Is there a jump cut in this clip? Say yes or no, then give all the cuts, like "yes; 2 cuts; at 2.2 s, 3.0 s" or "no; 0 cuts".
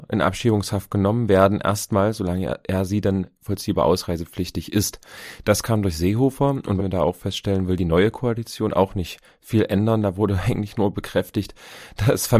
yes; 1 cut; at 6.8 s